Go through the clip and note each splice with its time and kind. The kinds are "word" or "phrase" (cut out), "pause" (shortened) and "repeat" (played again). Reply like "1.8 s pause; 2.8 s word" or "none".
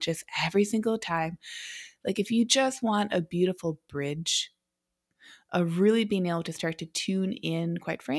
none